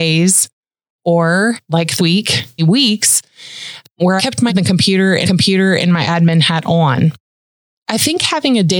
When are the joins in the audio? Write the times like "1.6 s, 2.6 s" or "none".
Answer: 2.0 s, 2.6 s, 4.2 s, 4.5 s, 5.2 s